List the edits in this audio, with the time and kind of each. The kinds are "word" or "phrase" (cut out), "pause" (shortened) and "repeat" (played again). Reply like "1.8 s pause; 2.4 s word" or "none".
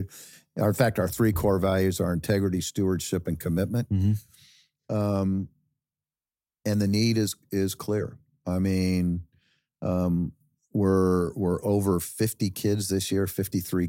none